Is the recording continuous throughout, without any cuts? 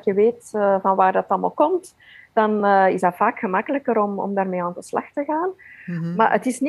yes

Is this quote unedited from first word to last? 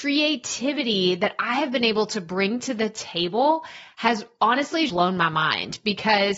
no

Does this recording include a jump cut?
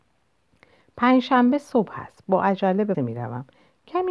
yes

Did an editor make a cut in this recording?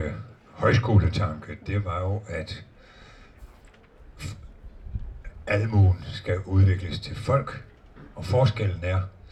no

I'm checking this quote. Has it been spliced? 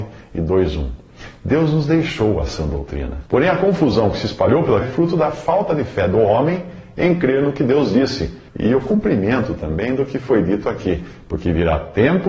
yes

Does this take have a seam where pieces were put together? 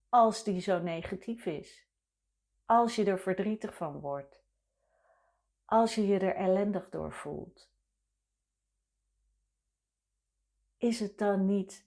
no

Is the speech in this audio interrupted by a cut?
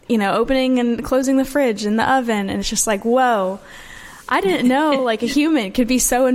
no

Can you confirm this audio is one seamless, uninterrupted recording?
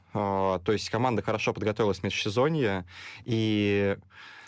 yes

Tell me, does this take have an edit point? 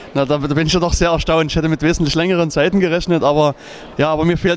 no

